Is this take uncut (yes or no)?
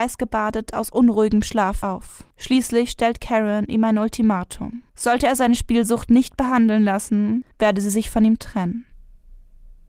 no